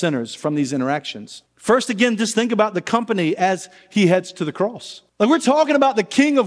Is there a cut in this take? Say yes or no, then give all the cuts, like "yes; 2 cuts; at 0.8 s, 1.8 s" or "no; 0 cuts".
yes; 2 cuts; at 1.5 s, 5.1 s